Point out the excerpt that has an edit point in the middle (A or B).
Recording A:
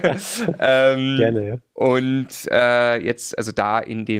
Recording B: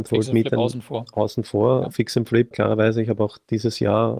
B